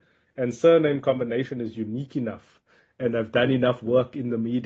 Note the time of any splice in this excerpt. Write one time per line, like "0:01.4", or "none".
none